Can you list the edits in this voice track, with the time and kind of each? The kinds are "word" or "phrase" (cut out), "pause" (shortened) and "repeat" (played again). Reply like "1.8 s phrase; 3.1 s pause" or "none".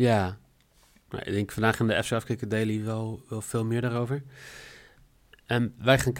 none